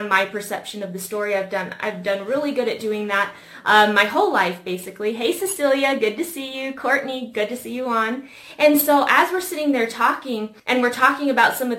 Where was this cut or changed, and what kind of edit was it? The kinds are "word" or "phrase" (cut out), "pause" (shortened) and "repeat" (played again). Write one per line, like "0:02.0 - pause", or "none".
0:10.6 - pause